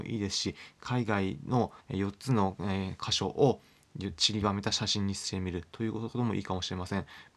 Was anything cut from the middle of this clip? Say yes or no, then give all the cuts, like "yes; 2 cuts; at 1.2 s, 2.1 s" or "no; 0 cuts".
yes; 1 cut; at 1.8 s